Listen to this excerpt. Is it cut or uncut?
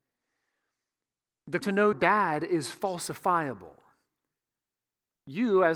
cut